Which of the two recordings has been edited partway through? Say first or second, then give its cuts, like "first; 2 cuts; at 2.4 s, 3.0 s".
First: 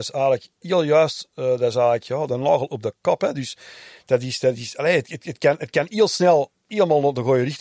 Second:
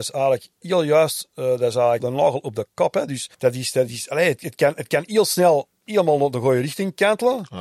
second; 3 cuts; at 2.0 s, 3.3 s, 4.4 s